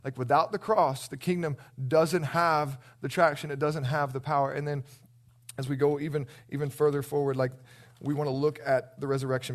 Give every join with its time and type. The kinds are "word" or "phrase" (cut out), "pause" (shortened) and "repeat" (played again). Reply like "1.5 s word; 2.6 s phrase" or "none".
none